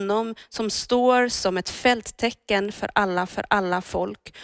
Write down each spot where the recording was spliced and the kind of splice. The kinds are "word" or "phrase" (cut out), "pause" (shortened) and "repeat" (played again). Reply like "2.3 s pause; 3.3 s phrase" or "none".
3.3 s repeat

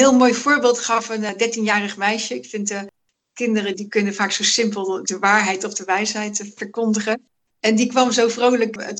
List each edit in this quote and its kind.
3.7 s word; 5.0 s word

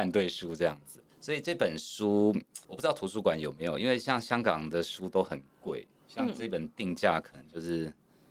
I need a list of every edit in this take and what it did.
1.1 s pause; 2.6 s pause

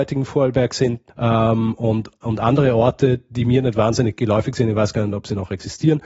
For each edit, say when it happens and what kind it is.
1.1 s pause

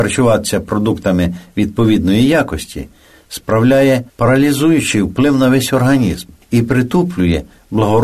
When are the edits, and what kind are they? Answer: 4.1 s pause

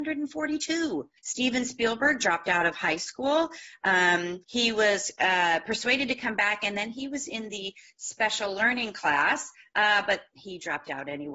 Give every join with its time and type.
1.2 s pause; 4.4 s pause

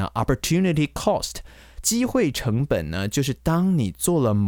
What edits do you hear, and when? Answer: none

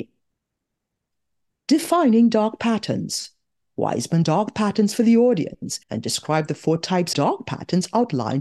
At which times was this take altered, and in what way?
4.2 s word; 5.8 s pause; 7.1 s word

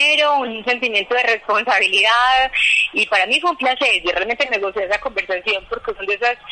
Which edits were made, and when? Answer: none

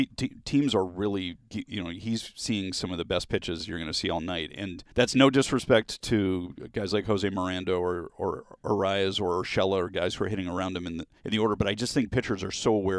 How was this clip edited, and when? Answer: 4.9 s pause; 11.2 s pause

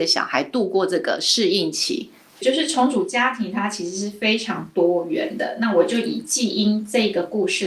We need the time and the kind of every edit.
none

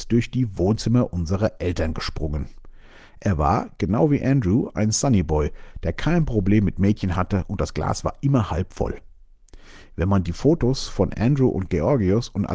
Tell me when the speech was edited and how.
none

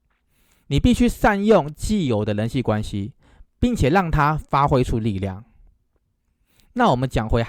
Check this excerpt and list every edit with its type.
none

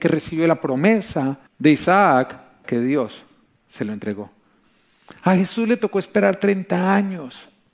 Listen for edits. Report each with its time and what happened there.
1.5 s pause; 2.6 s word

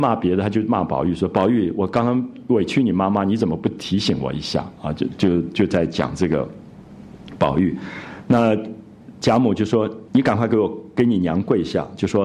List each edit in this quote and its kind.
10.1 s pause

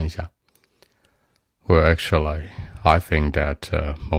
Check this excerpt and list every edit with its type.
none

